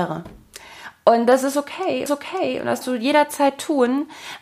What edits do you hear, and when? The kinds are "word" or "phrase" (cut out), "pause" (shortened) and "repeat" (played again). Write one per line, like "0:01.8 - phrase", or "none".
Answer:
0:02.1 - repeat
0:02.8 - word